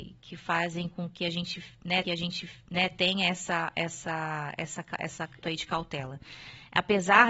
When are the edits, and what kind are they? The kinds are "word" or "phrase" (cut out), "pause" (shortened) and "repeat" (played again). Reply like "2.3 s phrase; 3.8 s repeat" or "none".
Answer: 2.0 s repeat; 5.4 s phrase